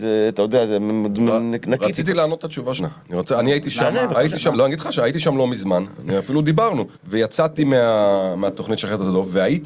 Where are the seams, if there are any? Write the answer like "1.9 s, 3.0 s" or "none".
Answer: 2.8 s, 4.5 s, 6.9 s